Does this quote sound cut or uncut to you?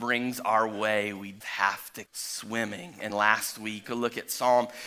cut